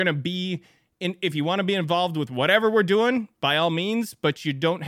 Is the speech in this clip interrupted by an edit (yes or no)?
no